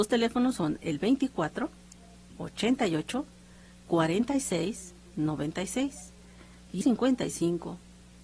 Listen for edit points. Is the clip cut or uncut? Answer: cut